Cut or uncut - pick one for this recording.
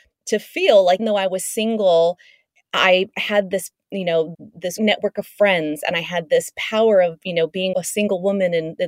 cut